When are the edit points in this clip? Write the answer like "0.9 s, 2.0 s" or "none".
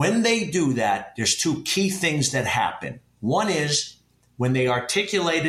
none